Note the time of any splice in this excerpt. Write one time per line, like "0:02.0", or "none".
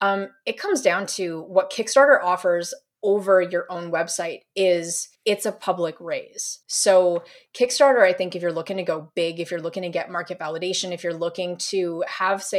0:05.1
0:06.6

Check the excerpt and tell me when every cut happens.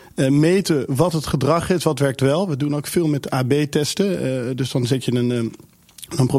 none

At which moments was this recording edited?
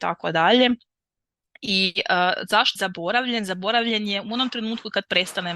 0:02.8

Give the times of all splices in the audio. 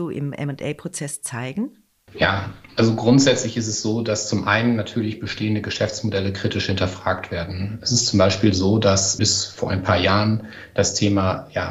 0:09.2

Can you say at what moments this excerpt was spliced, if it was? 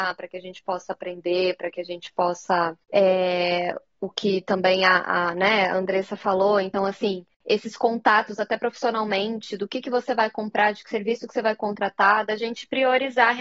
0:02.8
0:07.3

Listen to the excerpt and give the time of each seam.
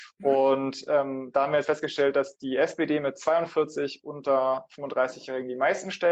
0:01.6

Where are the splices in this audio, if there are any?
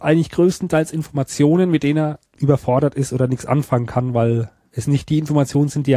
0:02.3

